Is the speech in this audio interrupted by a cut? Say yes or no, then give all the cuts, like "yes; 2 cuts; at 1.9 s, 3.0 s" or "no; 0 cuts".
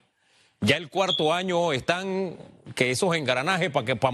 no; 0 cuts